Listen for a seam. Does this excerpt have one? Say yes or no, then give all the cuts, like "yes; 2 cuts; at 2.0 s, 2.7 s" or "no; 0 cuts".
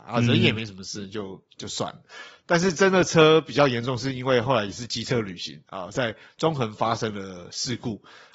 no; 0 cuts